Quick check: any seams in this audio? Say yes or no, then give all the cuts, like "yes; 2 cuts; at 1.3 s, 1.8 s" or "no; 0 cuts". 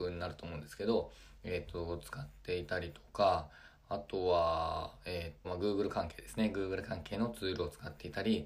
yes; 1 cut; at 5.4 s